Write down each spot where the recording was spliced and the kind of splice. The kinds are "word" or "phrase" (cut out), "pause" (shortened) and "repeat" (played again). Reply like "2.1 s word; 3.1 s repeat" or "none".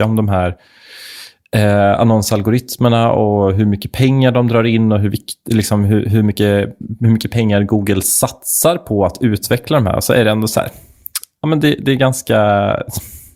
none